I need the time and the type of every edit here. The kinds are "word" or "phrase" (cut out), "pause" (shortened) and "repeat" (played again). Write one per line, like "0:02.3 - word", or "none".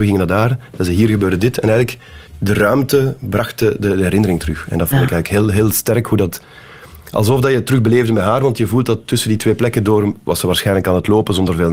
0:02.3 - pause